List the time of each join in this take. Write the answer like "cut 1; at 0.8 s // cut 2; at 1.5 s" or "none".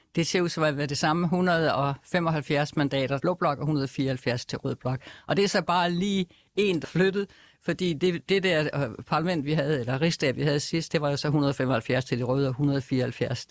cut 1; at 3.2 s // cut 2; at 6.8 s